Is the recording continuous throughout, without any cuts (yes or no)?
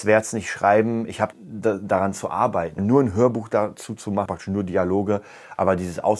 no